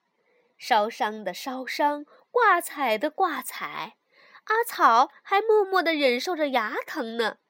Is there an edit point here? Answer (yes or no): no